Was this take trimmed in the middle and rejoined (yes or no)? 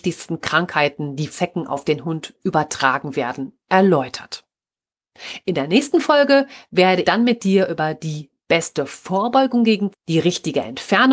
yes